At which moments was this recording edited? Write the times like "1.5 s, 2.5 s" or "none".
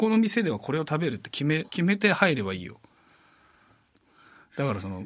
1.7 s